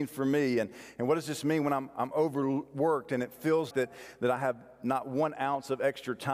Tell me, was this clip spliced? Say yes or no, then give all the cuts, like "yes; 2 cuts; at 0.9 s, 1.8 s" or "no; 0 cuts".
yes; 1 cut; at 3.7 s